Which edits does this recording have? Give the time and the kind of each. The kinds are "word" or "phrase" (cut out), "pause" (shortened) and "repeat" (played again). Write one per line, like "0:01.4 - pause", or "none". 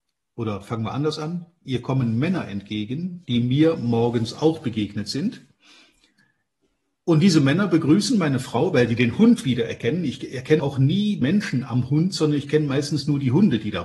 0:10.6 - word
0:11.2 - word